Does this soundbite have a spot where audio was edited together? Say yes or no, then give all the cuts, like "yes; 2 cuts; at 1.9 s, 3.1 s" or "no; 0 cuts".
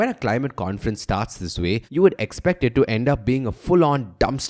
yes; 1 cut; at 1.9 s